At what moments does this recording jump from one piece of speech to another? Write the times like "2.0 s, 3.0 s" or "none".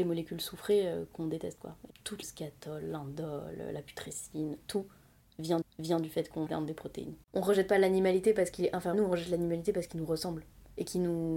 1.9 s, 2.2 s, 5.6 s, 6.5 s, 7.2 s, 8.9 s